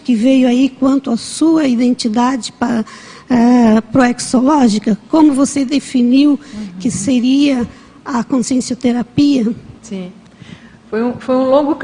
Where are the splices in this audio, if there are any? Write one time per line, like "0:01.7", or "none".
0:09.8